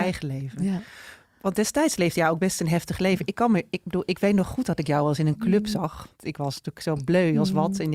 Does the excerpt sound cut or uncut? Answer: uncut